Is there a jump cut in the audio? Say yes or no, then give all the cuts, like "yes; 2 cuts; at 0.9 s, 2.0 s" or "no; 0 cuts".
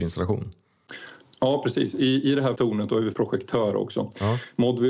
yes; 2 cuts; at 2.6 s, 3.1 s